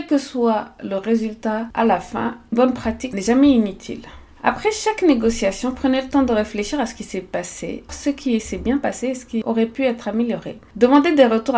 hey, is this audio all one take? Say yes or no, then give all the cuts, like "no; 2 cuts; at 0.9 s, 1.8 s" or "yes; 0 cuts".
no; 2 cuts; at 2.5 s, 7.9 s